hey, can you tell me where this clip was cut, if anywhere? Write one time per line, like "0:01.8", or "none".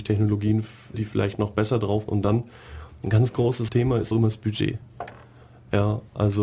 0:00.9
0:02.1
0:03.7
0:04.1